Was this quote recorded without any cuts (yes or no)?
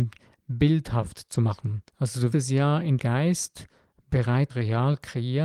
no